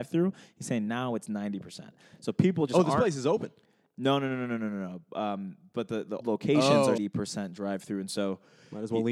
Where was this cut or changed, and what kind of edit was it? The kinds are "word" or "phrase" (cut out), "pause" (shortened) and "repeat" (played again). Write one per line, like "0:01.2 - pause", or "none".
0:06.2 - word
0:07.0 - phrase

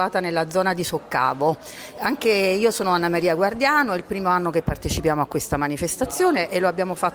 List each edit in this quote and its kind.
none

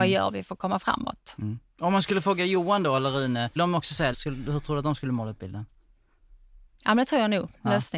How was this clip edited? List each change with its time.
0:03.6 - word
0:04.1 - phrase

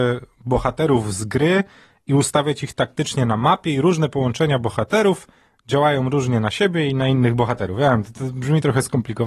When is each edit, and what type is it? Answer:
none

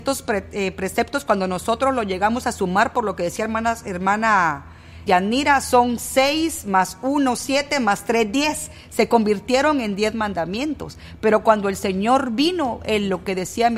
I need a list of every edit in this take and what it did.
0:05.1 - word

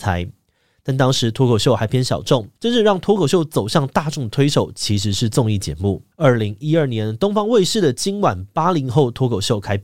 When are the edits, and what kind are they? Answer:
0:02.6 - pause
0:06.1 - pause

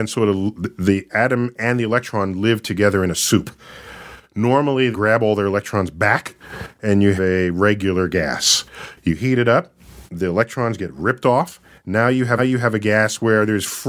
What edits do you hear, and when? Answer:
0:04.9 - phrase
0:07.2 - word
0:10.1 - pause
0:12.4 - repeat

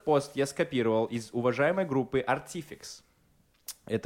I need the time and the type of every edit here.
none

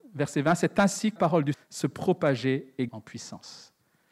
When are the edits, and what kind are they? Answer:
0:01.2 - word
0:01.5 - word
0:02.9 - word

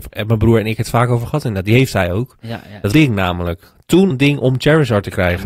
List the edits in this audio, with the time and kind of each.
0:02.9 - phrase
0:04.1 - word

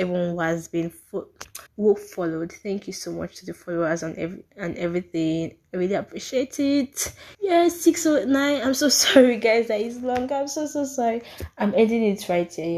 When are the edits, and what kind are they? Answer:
0:01.7 - pause
0:07.3 - pause

